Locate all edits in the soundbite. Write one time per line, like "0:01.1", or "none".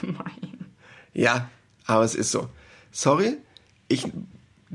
none